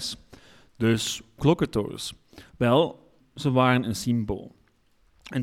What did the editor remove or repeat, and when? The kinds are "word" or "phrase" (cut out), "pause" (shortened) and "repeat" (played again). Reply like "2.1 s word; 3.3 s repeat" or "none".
1.4 s word; 3.2 s word